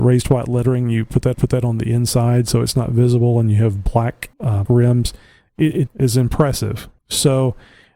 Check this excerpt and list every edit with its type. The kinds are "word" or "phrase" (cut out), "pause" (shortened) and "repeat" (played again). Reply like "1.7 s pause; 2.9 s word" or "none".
1.3 s repeat; 4.3 s word; 4.6 s word; 5.9 s word; 7.0 s pause